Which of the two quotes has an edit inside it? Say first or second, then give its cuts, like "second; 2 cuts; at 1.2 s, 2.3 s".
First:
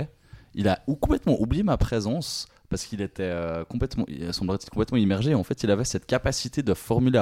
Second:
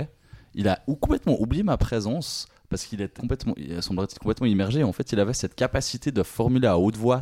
second; 1 cut; at 3.2 s